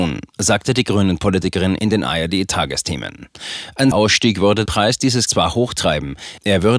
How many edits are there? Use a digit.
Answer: 3